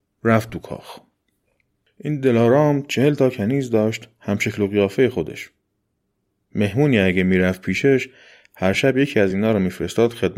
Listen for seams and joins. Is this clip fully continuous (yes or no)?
yes